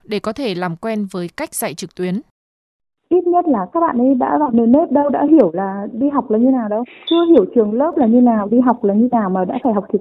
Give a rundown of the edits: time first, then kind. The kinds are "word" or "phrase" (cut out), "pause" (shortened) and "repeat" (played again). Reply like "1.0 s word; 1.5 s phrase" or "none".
none